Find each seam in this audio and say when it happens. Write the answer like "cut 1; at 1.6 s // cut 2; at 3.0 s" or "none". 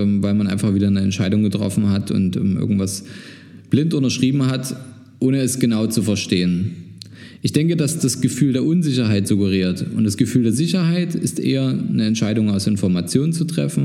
cut 1; at 8.0 s